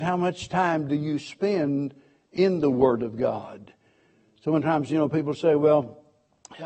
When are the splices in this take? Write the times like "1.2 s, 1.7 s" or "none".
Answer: none